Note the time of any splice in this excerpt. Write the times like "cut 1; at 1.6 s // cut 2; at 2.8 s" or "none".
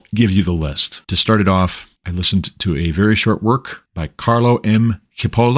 cut 1; at 1.0 s // cut 2; at 2.0 s // cut 3; at 3.9 s